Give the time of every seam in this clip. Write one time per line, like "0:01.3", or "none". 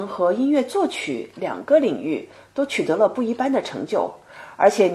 none